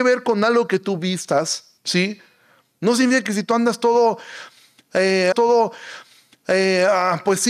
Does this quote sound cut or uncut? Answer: cut